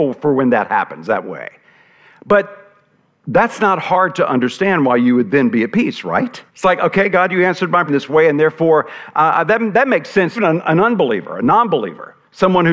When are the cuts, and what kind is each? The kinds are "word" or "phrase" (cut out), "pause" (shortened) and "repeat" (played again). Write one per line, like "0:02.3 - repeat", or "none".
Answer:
0:06.5 - pause
0:07.9 - word
0:10.4 - word

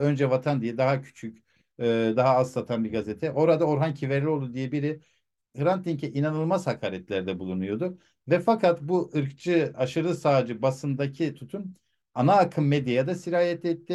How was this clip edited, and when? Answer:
none

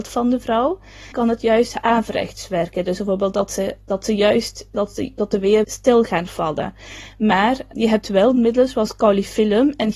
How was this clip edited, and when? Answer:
0:01.1 - word
0:04.7 - word
0:05.6 - phrase
0:07.7 - word

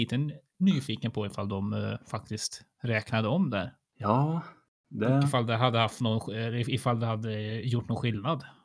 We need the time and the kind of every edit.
none

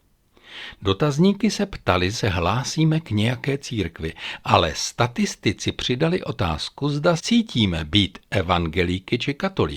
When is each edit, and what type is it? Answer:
0:02.1 - word
0:07.2 - word

